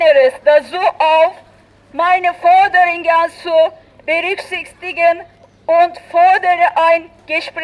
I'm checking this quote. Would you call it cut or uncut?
uncut